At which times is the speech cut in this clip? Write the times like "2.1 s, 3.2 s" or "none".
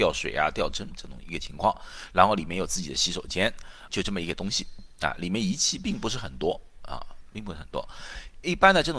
3.9 s